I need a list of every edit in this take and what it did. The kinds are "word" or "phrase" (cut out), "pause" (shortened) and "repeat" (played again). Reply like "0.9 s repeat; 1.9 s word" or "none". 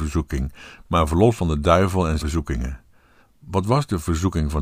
1.4 s word; 2.2 s word; 3.2 s pause